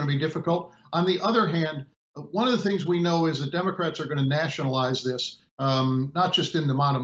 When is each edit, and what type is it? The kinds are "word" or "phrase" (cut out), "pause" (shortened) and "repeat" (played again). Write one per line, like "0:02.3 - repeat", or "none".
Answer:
none